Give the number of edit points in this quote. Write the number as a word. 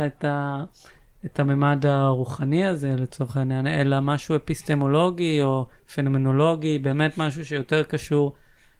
zero